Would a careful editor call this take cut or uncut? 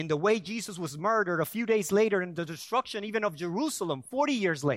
uncut